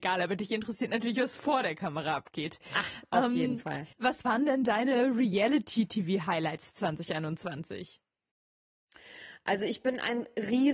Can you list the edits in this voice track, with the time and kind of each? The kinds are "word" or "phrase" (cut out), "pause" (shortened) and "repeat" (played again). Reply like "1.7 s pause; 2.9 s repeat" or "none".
3.9 s pause